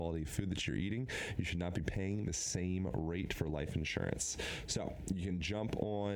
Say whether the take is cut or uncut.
uncut